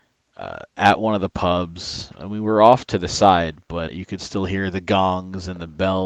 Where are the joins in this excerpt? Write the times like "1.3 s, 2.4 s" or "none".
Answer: 3.9 s